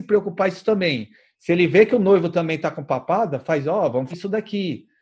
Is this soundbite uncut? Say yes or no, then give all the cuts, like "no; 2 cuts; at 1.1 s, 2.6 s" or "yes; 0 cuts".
no; 1 cut; at 4.1 s